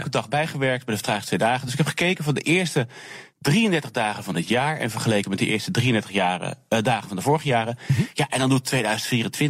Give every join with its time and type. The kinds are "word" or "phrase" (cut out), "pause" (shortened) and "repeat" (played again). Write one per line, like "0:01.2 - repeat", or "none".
none